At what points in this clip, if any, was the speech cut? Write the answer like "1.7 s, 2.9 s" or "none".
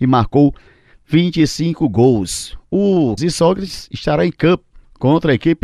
3.2 s